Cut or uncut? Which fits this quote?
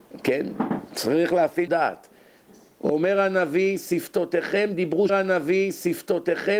cut